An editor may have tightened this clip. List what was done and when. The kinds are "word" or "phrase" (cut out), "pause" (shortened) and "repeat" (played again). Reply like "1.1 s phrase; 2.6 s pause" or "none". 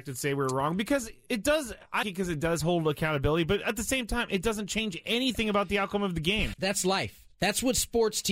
2.0 s word; 6.5 s word

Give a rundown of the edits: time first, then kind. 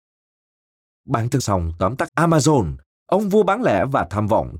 1.4 s phrase; 2.1 s word

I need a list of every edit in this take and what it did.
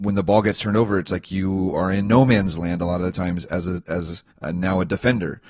4.3 s pause

